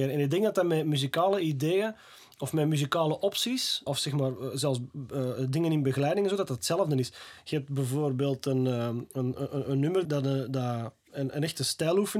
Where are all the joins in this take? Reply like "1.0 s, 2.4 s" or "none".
3.9 s, 9.1 s, 10.0 s